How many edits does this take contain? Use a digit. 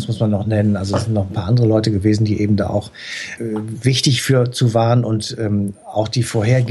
1